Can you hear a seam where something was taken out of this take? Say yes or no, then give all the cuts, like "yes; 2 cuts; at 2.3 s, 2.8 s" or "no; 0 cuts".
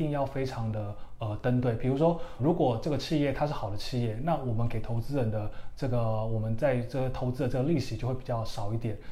yes; 1 cut; at 2.4 s